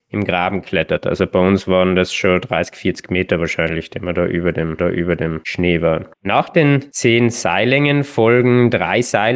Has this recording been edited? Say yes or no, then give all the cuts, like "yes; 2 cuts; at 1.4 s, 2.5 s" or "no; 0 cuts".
yes; 2 cuts; at 4.8 s, 6.1 s